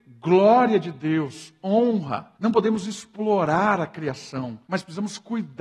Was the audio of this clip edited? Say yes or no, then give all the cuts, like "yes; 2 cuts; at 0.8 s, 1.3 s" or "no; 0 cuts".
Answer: yes; 2 cuts; at 2.3 s, 4.6 s